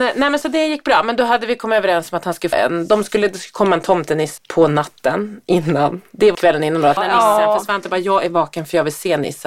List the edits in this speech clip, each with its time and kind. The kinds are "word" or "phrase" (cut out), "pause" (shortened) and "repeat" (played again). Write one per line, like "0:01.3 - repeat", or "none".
0:02.5 - word
0:04.4 - word
0:06.3 - phrase
0:07.0 - word